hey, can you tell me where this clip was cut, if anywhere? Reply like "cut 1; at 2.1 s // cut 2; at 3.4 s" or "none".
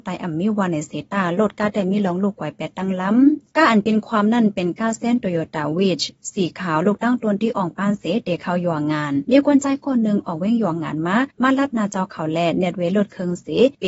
cut 1; at 11.3 s